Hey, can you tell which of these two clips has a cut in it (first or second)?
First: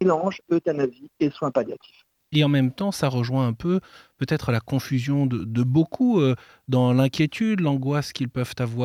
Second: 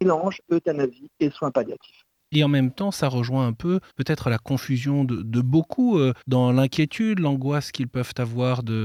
second